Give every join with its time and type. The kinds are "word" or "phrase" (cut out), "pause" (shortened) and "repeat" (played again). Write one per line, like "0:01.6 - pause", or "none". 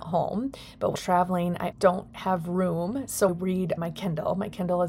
0:00.9 - word
0:01.7 - word
0:03.3 - word
0:03.8 - word